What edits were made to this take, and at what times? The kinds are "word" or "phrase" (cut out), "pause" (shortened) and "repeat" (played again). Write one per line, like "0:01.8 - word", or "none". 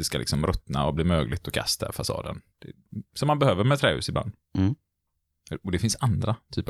0:02.5 - pause